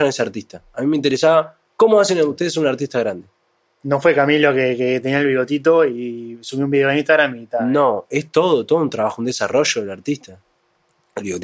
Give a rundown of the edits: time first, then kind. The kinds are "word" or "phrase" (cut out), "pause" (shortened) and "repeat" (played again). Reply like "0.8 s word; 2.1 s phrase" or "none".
none